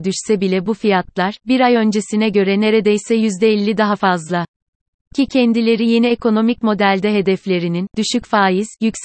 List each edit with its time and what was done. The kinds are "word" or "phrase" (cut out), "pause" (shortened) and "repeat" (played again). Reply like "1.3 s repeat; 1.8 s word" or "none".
none